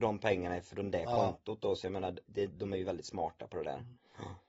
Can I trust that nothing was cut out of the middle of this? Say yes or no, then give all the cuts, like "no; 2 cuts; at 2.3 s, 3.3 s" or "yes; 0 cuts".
no; 1 cut; at 2.3 s